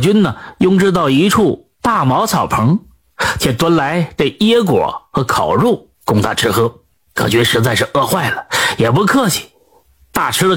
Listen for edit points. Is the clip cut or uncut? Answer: cut